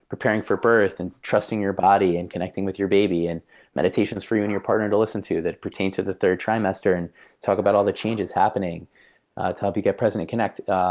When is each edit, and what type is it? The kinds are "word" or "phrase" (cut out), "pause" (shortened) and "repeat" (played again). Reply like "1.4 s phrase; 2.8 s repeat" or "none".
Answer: none